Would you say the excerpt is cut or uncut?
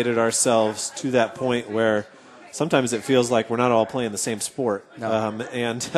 uncut